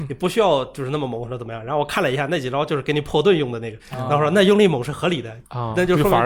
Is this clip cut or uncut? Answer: cut